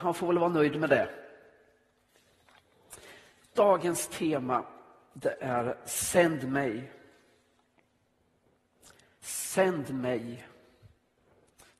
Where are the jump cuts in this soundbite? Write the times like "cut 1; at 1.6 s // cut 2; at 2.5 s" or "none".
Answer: none